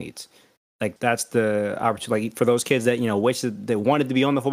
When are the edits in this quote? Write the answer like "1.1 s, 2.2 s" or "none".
1.0 s